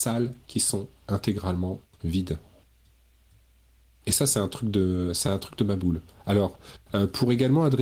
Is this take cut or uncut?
uncut